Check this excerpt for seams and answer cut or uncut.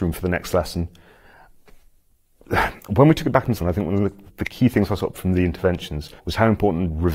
cut